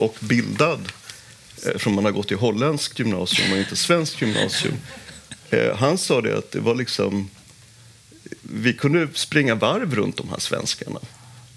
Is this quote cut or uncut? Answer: uncut